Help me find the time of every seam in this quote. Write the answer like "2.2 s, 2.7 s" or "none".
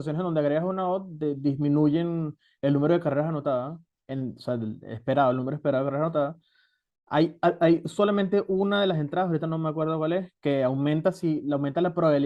none